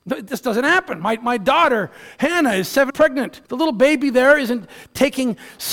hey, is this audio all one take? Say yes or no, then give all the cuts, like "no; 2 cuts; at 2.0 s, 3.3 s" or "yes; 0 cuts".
no; 2 cuts; at 2.9 s, 3.4 s